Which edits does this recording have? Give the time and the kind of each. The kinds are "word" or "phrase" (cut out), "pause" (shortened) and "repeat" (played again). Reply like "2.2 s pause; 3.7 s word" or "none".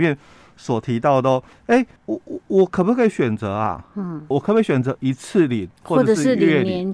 1.5 s pause; 2.0 s pause; 4.3 s word